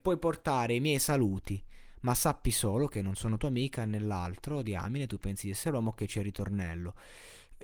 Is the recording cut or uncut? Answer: uncut